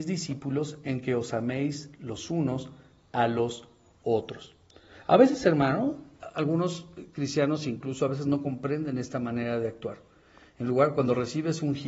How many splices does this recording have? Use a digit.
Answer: 0